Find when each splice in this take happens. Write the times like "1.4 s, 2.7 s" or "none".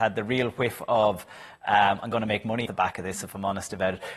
2.7 s